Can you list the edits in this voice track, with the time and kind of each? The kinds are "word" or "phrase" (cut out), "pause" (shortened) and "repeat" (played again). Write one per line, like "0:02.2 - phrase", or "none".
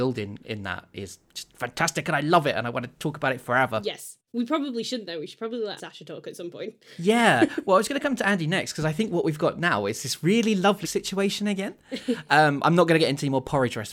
0:04.3 - pause
0:05.8 - phrase
0:10.8 - phrase
0:12.6 - word